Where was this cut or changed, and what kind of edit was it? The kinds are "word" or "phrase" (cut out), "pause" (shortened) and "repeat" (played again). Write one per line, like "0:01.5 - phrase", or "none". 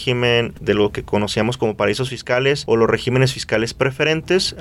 none